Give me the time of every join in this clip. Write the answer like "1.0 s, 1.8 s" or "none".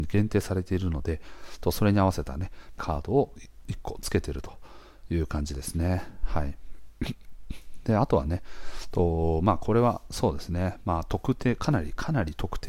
2.8 s

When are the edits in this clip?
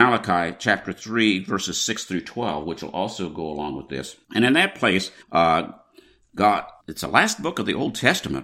4.2 s, 5.2 s, 6.8 s

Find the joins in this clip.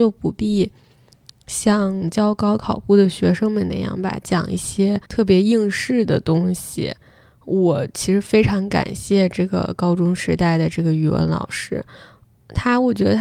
5.1 s

